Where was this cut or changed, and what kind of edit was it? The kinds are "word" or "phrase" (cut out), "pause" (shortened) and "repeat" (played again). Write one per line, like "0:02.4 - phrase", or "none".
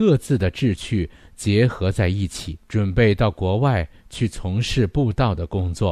0:02.6 - pause